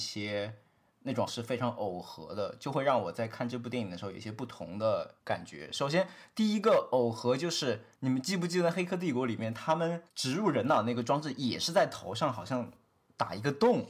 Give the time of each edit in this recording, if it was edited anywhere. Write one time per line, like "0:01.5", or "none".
0:01.3
0:07.9
0:10.1

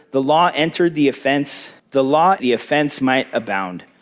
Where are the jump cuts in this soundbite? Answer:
0:01.8
0:02.4

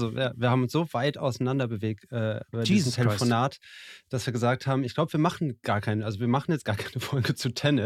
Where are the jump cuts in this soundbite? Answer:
none

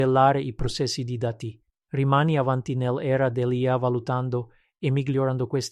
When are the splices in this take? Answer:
none

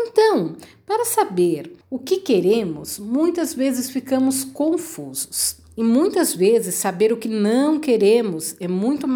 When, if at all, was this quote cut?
0:01.8

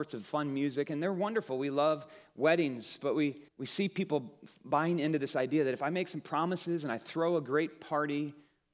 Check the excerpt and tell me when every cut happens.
0:03.5

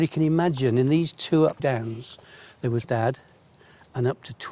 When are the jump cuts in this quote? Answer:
0:01.6
0:02.8

